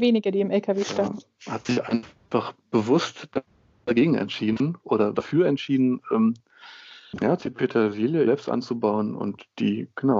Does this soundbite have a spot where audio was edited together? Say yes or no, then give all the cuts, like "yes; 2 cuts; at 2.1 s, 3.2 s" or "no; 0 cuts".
yes; 3 cuts; at 5.1 s, 7.4 s, 8.2 s